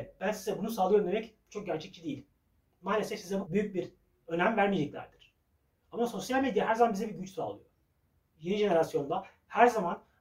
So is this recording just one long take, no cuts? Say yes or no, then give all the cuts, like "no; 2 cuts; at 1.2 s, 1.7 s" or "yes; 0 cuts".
no; 1 cut; at 3.5 s